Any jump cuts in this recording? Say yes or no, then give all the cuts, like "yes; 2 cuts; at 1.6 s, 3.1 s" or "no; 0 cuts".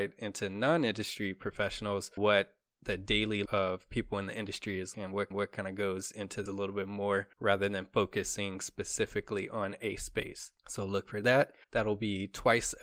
yes; 8 cuts; at 2.2 s, 3.5 s, 4.9 s, 5.3 s, 6.5 s, 7.3 s, 10.6 s, 11.6 s